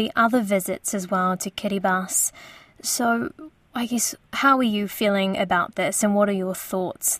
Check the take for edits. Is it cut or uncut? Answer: uncut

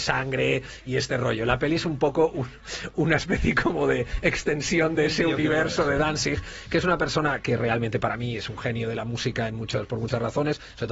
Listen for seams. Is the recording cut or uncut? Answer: uncut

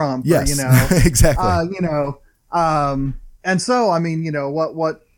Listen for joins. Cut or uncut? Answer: cut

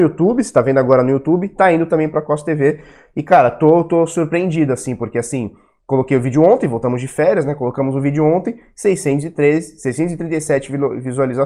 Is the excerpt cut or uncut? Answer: uncut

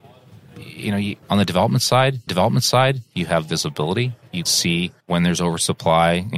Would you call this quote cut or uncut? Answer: cut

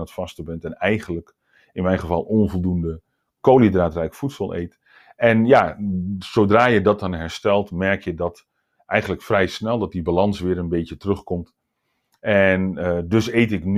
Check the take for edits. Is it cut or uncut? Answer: uncut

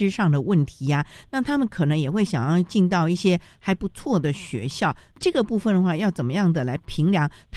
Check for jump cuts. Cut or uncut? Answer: uncut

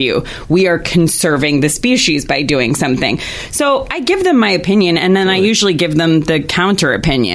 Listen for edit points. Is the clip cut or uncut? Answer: uncut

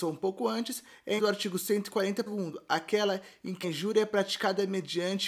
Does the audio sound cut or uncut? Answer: cut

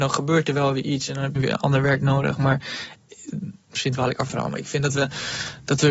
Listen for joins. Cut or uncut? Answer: cut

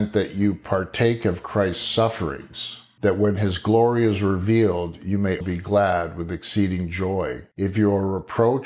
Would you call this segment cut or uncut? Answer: cut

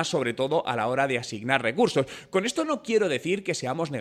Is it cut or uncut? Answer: uncut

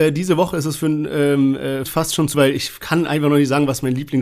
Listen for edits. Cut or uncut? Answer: cut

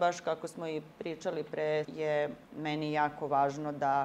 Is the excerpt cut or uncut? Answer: cut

